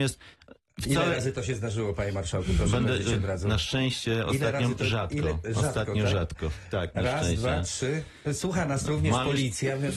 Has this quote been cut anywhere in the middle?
no; 0 cuts

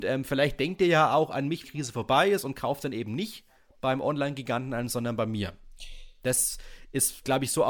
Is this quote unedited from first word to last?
no; 1 cut; at 1.6 s

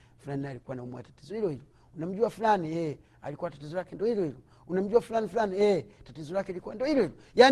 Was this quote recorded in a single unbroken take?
yes; 0 cuts

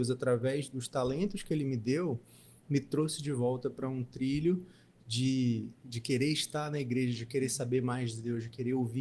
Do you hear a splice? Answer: no; 0 cuts

